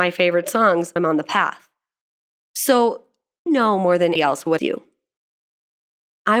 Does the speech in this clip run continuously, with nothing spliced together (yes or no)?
no